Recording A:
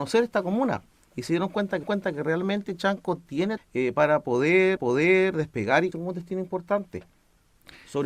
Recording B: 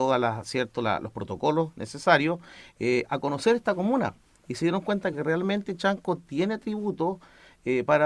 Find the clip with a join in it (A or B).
A